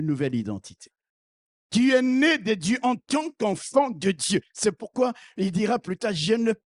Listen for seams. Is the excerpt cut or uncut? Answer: uncut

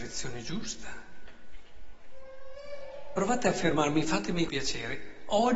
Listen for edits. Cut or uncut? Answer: cut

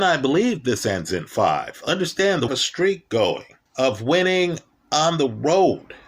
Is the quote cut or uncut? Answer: cut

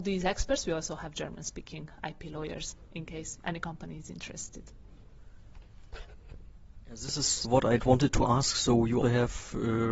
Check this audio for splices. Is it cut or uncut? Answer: cut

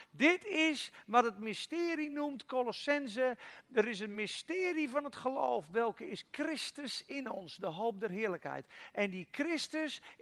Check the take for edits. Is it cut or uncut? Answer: uncut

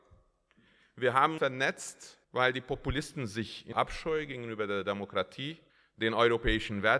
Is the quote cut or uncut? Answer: cut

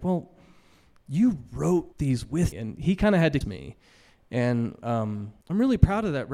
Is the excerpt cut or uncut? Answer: cut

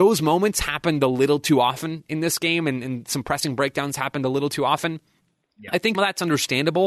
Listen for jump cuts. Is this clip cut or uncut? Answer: cut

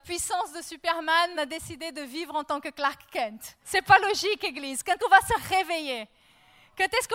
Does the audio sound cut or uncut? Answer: cut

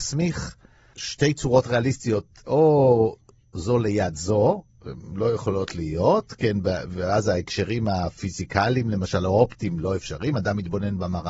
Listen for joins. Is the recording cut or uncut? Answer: uncut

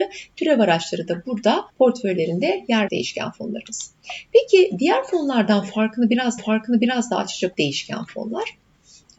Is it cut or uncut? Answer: cut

